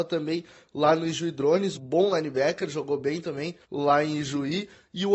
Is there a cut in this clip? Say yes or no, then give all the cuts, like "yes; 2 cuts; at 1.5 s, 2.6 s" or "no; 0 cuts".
yes; 2 cuts; at 1.7 s, 3.6 s